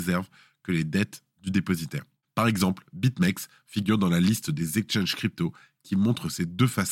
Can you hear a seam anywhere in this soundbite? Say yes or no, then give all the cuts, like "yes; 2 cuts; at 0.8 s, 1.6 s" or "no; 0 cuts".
no; 0 cuts